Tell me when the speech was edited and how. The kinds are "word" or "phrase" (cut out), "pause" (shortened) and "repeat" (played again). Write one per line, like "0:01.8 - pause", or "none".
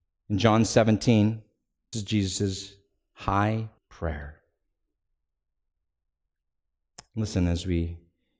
0:01.9 - word
0:03.8 - word